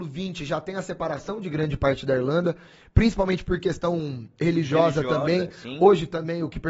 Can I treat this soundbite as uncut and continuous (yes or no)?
yes